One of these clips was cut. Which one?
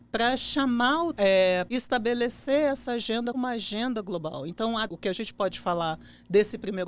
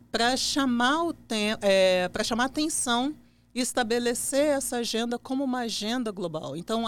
first; 4 cuts; at 1.2 s, 1.7 s, 3.3 s, 4.9 s

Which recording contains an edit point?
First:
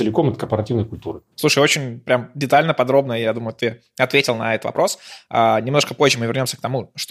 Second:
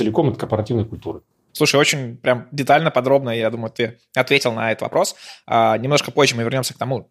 first; 1 cut; at 1.3 s

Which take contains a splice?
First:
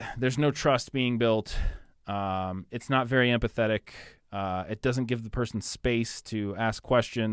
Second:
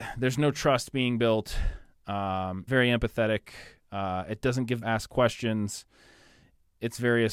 second; 2 cuts; at 2.7 s, 4.8 s

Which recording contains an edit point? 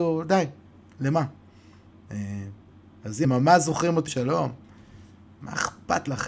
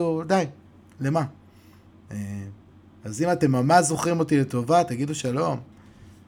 first; 2 cuts; at 3.2 s, 4.1 s

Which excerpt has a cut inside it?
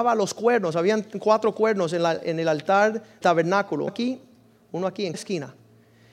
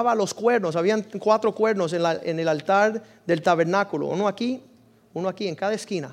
first; 3 cuts; at 3.2 s, 3.9 s, 5.1 s

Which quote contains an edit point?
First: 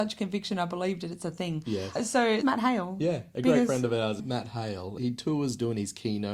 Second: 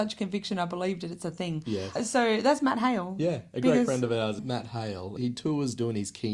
first; 1 cut; at 2.4 s

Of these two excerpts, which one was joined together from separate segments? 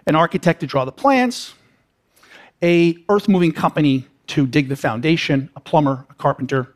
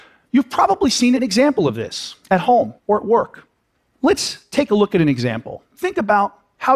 second; 3 cuts; at 2.2 s, 2.8 s, 3.8 s

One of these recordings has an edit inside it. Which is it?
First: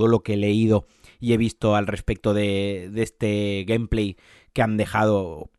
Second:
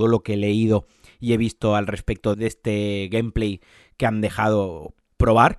second; 1 cut; at 2.3 s

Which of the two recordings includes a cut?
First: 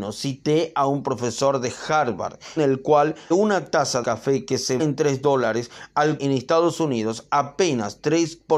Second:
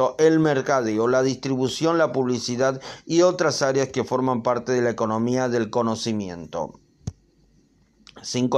first; 5 cuts; at 2.6 s, 3.3 s, 4.0 s, 4.8 s, 6.2 s

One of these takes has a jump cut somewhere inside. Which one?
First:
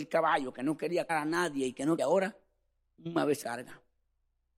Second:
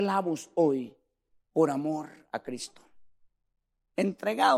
first; 3 cuts; at 1.1 s, 2.0 s, 3.4 s

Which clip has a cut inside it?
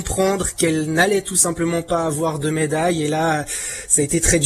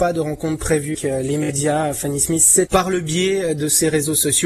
second; 2 cuts; at 0.9 s, 2.7 s

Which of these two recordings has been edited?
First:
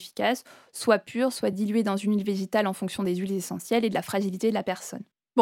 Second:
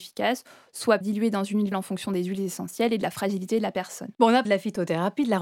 second; 4 cuts; at 1.0 s, 1.7 s, 4.1 s, 4.4 s

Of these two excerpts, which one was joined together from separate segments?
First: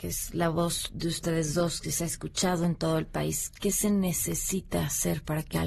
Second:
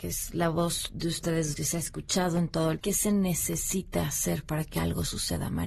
second; 2 cuts; at 1.5 s, 2.8 s

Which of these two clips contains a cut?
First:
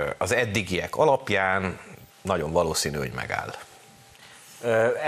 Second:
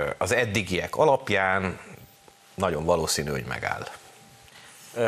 first; 1 cut; at 2.1 s

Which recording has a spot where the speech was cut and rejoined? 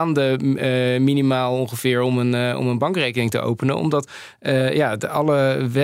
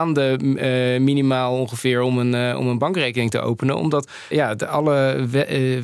second; 1 cut; at 4.3 s

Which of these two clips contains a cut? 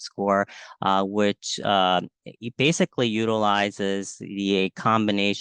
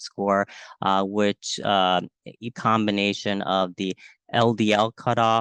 second; 1 cut; at 2.5 s

